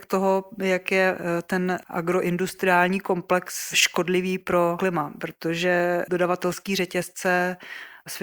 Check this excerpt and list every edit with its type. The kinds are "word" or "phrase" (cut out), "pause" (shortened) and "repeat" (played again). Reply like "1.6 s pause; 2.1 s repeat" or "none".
none

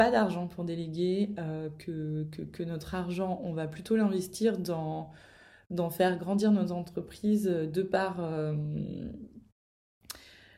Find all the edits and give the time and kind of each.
none

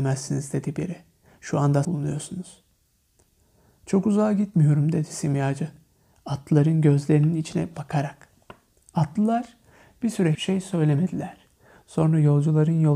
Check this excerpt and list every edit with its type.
1.8 s phrase; 8.8 s pause; 10.3 s word

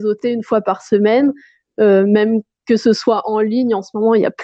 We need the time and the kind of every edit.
none

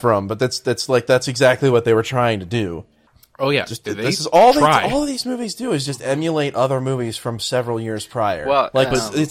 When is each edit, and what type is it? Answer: none

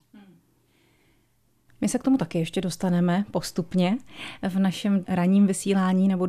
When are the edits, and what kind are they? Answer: 5.0 s word

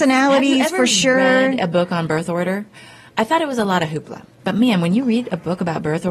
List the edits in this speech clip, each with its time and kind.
none

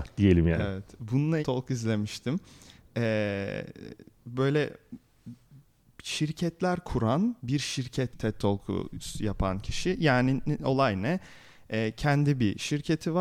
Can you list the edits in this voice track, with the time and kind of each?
1.4 s phrase; 7.4 s pause; 8.1 s word

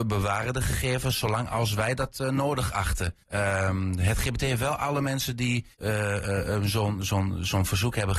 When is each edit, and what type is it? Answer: 3.2 s pause; 5.7 s pause

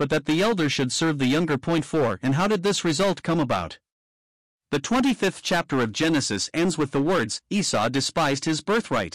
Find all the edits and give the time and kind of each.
none

